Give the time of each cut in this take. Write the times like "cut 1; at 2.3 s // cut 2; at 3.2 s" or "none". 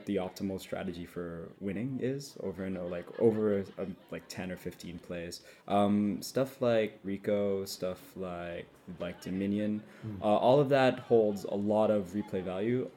cut 1; at 1.6 s // cut 2; at 4.0 s // cut 3; at 5.6 s // cut 4; at 7.0 s // cut 5; at 9.0 s